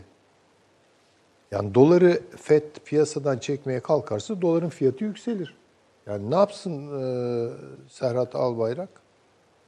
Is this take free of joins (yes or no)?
yes